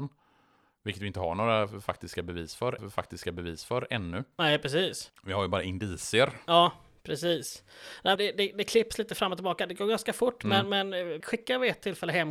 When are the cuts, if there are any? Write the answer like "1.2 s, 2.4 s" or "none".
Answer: 2.8 s, 8.2 s, 11.2 s